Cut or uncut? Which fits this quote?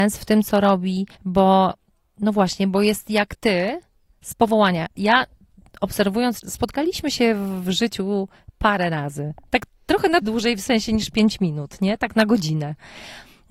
cut